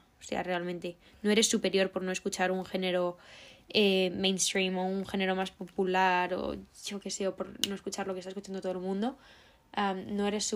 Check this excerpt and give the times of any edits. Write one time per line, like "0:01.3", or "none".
none